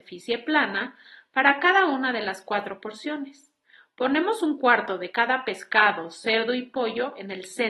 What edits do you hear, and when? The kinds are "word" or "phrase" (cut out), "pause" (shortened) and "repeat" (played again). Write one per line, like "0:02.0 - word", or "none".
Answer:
none